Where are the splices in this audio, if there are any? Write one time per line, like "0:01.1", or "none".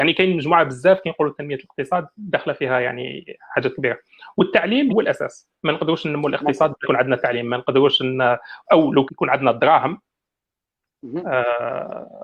0:02.1
0:04.9
0:05.6
0:06.8
0:09.1